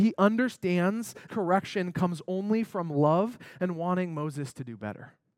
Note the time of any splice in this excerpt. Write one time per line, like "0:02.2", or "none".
0:01.3